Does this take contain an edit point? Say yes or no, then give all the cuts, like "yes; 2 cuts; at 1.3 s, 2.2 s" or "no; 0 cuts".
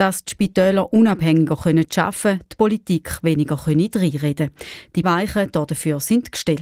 yes; 1 cut; at 5.0 s